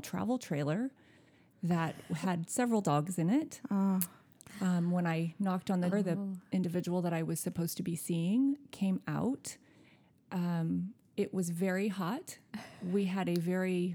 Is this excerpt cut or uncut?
cut